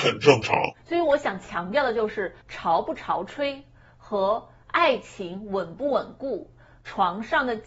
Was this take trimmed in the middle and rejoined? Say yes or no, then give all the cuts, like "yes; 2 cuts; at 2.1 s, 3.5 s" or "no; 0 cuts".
yes; 1 cut; at 2.4 s